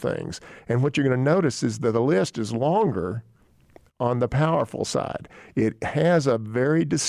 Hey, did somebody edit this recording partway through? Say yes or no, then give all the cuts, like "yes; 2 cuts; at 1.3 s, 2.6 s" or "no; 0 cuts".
no; 0 cuts